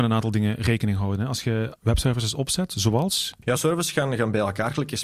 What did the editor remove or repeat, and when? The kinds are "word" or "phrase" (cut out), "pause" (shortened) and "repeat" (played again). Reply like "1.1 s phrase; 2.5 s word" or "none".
1.8 s word; 3.6 s word